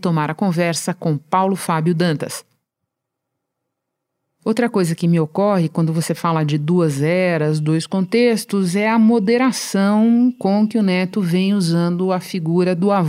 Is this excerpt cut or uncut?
uncut